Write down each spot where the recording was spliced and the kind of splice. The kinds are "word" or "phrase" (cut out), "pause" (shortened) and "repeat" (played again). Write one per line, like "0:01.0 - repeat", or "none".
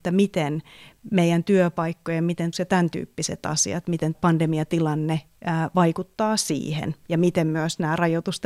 0:02.5 - word
0:04.1 - word